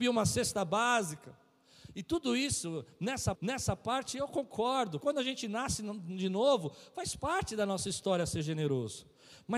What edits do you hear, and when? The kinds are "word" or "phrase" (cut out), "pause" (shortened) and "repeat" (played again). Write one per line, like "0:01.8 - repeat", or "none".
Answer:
0:03.3 - repeat
0:05.0 - word